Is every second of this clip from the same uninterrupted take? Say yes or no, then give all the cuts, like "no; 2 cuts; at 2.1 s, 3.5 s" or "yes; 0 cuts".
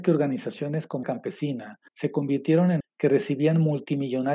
no; 3 cuts; at 1.0 s, 1.9 s, 2.8 s